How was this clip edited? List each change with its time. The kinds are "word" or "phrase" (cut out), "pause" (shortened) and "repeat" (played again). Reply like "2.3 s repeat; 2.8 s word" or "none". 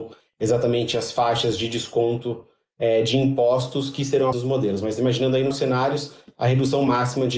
4.3 s word; 5.5 s word